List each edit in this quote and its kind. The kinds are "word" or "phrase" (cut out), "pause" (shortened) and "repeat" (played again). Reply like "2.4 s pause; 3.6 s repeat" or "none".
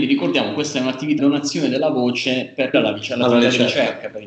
1.2 s word; 2.7 s word